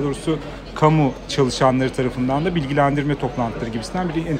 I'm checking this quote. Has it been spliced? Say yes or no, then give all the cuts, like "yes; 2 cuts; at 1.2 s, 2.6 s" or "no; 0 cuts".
no; 0 cuts